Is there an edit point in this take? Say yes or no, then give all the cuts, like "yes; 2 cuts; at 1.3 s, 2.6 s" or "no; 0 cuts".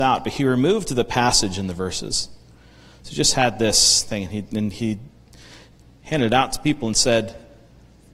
no; 0 cuts